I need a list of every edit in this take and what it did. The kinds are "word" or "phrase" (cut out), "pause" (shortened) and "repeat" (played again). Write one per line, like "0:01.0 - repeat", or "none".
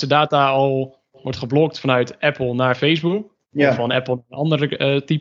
0:03.4 - pause